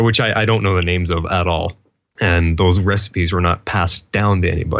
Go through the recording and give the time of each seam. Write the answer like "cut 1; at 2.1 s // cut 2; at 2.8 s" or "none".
none